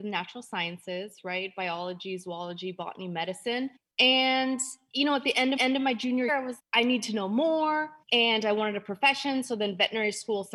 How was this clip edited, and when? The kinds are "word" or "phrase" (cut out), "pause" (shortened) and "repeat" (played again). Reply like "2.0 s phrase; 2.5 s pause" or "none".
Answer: 3.8 s pause; 5.6 s repeat; 6.3 s word; 6.6 s word; 8.0 s pause